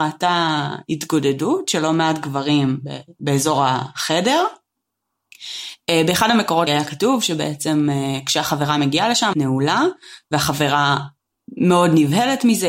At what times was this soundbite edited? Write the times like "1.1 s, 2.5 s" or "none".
6.7 s, 9.3 s